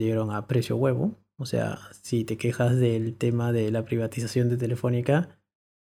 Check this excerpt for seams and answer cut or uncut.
uncut